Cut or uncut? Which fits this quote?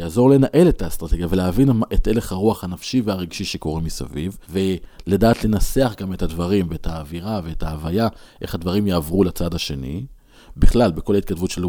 cut